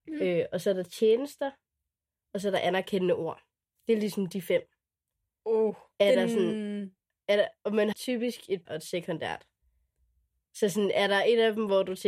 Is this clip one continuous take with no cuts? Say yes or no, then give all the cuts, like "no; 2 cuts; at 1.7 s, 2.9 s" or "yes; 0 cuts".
no; 3 cuts; at 5.9 s, 7.9 s, 8.7 s